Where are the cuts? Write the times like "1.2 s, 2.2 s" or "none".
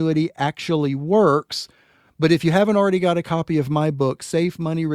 none